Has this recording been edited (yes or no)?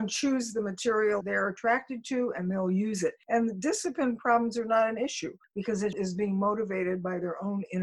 yes